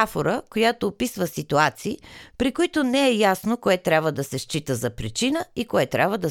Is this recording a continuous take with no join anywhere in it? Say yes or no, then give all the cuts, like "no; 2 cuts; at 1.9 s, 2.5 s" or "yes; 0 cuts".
yes; 0 cuts